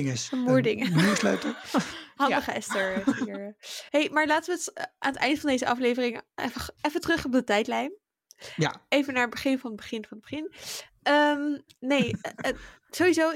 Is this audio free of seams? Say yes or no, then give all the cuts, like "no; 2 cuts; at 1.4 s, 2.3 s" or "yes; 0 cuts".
no; 1 cut; at 3.9 s